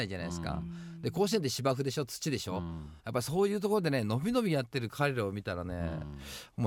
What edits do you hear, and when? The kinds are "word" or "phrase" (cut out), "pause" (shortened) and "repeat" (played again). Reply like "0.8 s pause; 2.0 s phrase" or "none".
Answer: 3.0 s pause